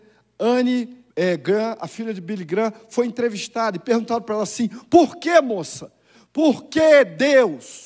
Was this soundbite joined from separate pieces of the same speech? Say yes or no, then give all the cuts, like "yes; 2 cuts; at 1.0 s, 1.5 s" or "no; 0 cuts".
yes; 1 cut; at 1.1 s